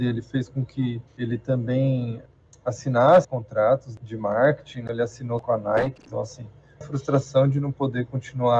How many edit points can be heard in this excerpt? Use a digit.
3